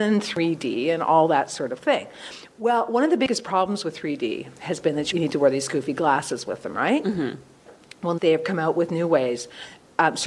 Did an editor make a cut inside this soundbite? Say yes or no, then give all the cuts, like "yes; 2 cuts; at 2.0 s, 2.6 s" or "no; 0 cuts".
yes; 2 cuts; at 5.1 s, 8.2 s